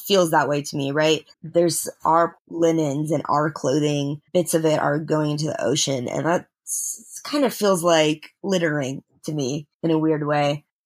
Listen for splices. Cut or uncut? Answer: cut